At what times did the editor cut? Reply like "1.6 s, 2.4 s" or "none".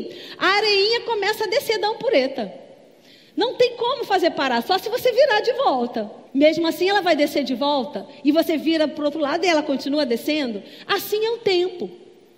6.3 s

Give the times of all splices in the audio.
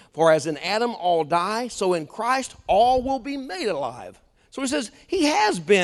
4.4 s

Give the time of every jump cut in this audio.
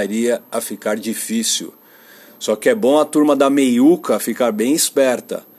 none

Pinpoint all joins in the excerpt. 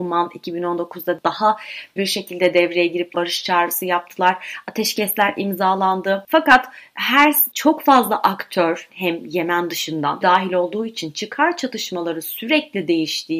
2.0 s, 3.1 s, 7.5 s, 8.9 s, 10.2 s

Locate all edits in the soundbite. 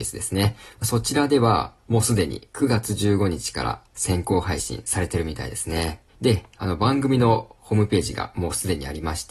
1.8 s, 6.1 s

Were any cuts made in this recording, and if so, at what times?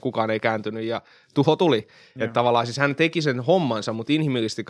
none

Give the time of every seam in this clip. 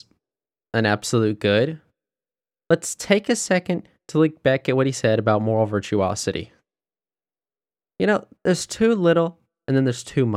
none

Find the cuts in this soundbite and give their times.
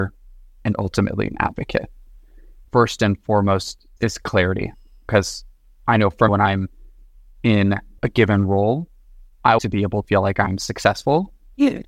2.7 s, 6.3 s, 8.0 s, 9.6 s, 10.0 s

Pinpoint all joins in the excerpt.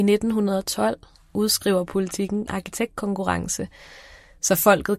2.5 s

